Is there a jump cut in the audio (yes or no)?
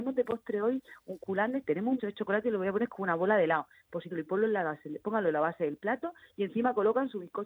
yes